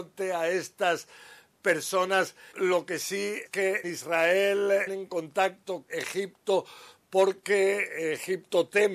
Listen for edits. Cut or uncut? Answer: cut